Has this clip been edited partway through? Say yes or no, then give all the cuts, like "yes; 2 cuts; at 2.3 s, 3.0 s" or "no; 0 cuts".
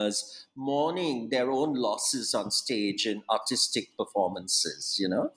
no; 0 cuts